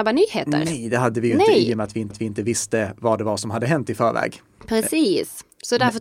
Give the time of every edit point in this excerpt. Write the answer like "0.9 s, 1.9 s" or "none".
2.1 s